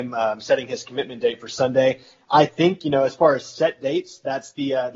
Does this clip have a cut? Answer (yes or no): no